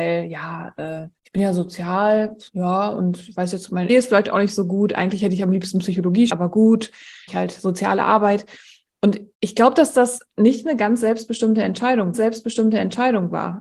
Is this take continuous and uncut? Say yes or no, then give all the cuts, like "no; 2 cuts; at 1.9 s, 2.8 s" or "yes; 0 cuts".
no; 7 cuts; at 1.2 s, 2.5 s, 3.9 s, 6.3 s, 7.3 s, 9.3 s, 12.1 s